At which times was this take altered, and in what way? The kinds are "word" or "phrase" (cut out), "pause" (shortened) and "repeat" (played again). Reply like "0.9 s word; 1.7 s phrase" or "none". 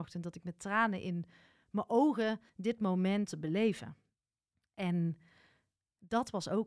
2.5 s pause; 3.3 s word; 4.5 s pause